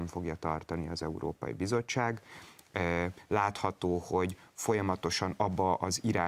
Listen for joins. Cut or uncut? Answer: uncut